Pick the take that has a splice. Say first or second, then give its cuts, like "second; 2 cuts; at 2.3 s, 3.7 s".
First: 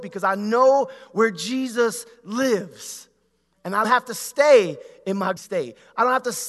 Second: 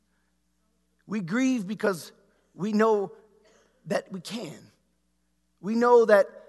first; 2 cuts; at 3.8 s, 5.4 s